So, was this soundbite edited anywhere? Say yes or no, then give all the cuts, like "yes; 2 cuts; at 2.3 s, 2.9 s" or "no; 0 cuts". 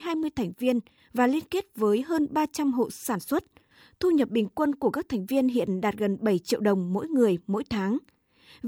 no; 0 cuts